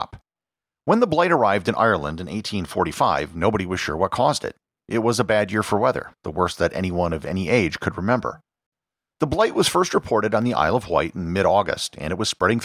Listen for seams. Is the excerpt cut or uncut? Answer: uncut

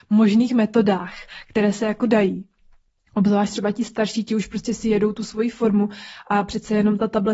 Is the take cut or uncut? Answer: uncut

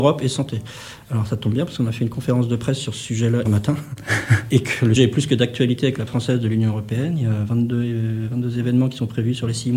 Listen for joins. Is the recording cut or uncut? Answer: cut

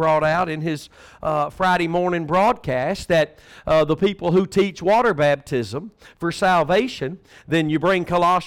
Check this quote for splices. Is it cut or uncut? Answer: uncut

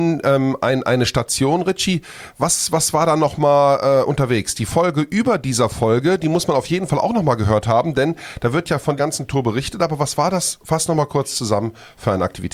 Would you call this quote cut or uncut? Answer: cut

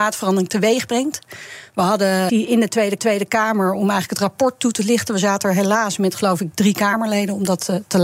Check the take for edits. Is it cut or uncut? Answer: cut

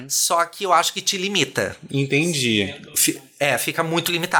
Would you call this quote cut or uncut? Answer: uncut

